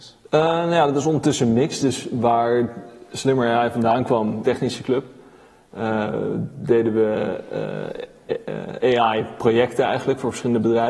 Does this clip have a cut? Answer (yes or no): yes